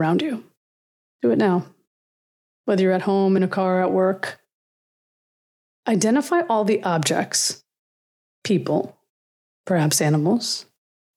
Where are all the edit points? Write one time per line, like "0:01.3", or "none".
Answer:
none